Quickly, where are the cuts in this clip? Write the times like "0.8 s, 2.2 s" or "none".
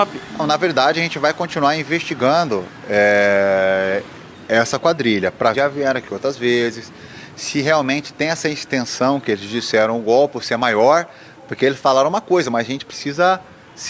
5.5 s